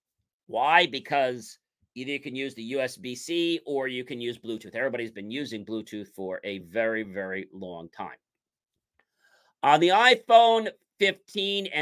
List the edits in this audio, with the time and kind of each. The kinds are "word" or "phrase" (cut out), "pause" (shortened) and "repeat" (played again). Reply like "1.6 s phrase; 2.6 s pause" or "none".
none